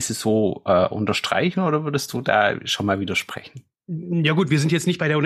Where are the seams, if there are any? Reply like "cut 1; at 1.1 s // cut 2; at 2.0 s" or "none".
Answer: cut 1; at 3.7 s